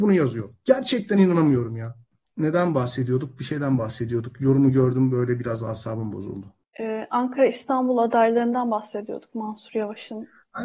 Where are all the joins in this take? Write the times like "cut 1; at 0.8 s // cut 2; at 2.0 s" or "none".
none